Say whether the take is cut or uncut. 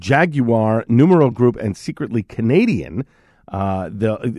uncut